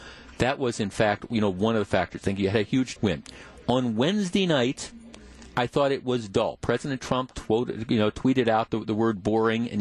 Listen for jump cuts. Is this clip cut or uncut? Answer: cut